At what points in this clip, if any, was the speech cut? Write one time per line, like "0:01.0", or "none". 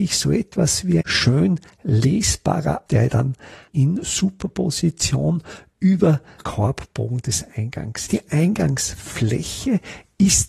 0:01.0
0:02.9
0:06.4
0:08.1